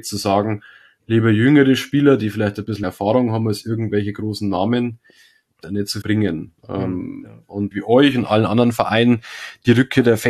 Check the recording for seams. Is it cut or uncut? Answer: cut